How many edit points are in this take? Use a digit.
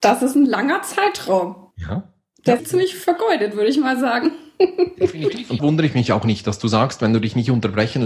3